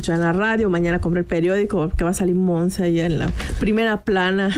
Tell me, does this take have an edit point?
no; 0 cuts

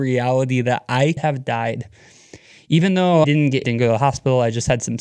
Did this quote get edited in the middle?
yes; 3 cuts; at 1.2 s, 3.2 s, 3.6 s

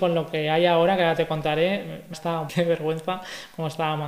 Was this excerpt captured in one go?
no; 2 cuts; at 2.1 s, 2.5 s

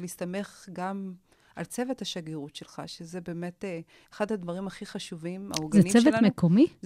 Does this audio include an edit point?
no; 0 cuts

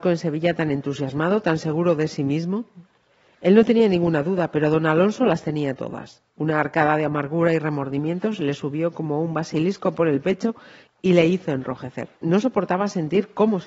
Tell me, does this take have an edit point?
yes; 2 cuts; at 6.3 s, 12.2 s

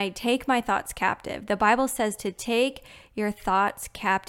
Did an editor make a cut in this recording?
no; 0 cuts

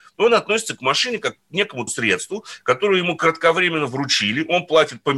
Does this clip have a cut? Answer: yes; 1 cut; at 1.9 s

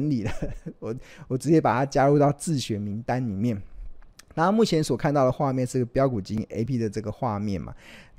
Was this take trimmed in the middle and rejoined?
yes; 1 cut; at 6.7 s

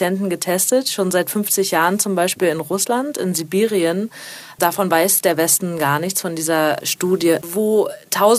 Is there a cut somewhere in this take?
yes; 1 cut; at 6.8 s

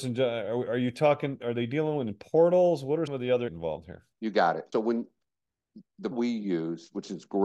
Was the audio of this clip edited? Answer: yes; 5 cuts; at 3.1 s, 3.5 s, 4.1 s, 4.7 s, 6.1 s

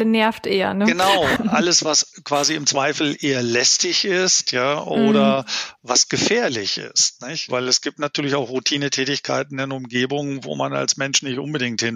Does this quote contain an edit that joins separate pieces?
yes; 1 cut; at 1.4 s

